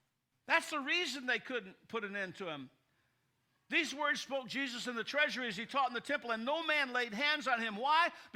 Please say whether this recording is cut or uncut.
uncut